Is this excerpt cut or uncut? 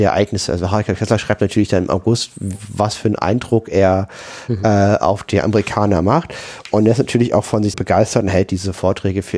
cut